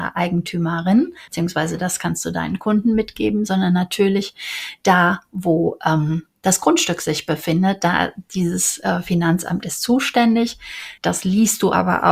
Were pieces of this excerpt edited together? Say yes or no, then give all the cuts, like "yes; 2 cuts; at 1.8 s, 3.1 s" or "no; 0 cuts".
yes; 2 cuts; at 1.3 s, 11.0 s